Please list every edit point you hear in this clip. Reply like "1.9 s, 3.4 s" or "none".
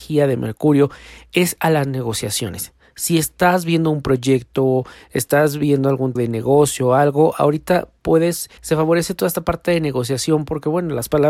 6.2 s, 8.6 s